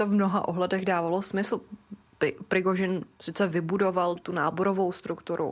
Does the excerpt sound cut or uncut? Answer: cut